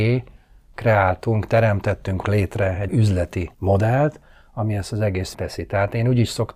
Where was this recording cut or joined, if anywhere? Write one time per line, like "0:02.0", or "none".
0:02.2
0:02.9
0:03.5
0:05.3